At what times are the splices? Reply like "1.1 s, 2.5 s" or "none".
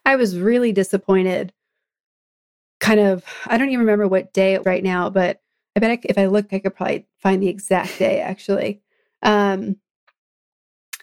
4.6 s, 6.5 s